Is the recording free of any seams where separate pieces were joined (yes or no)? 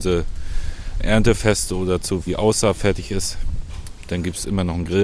no